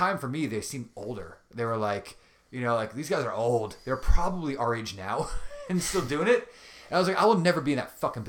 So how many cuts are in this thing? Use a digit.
0